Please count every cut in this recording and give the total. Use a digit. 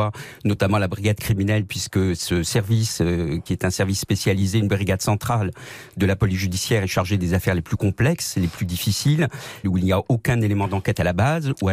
1